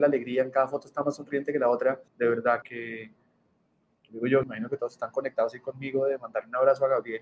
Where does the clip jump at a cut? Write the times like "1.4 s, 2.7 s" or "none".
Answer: 2.1 s, 2.6 s, 4.4 s